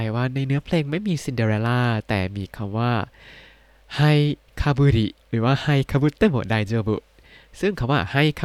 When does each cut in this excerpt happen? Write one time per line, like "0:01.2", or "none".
0:05.2